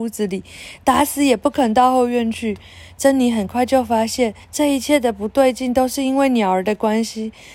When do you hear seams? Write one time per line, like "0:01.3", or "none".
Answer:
0:04.4